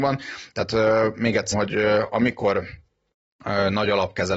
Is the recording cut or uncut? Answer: cut